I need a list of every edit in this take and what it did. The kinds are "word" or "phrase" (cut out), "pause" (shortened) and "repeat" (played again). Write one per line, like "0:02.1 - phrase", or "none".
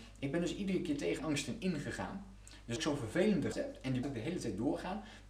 0:01.2 - word
0:02.8 - word
0:03.5 - word
0:04.0 - word